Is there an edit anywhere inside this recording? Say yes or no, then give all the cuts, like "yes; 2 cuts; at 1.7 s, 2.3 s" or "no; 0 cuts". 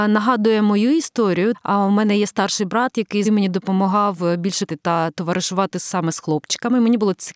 yes; 2 cuts; at 3.2 s, 4.7 s